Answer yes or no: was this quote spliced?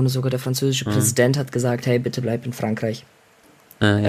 no